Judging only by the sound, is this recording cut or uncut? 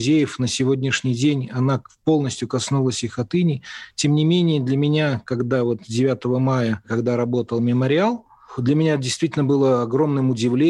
uncut